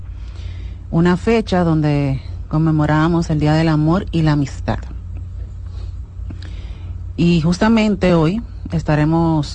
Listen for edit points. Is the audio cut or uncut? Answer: uncut